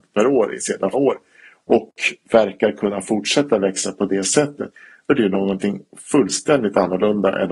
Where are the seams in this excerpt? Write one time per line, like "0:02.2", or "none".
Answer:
0:00.9
0:05.1